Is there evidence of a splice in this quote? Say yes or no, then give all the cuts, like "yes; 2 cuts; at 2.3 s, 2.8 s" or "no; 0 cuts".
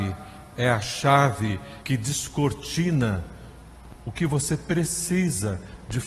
yes; 1 cut; at 1.8 s